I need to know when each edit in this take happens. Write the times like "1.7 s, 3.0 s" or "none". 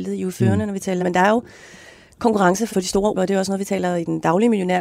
1.0 s, 2.7 s, 3.1 s